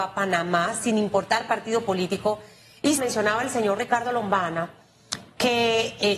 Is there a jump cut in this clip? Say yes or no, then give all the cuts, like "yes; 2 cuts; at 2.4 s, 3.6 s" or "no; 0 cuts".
yes; 1 cut; at 3.0 s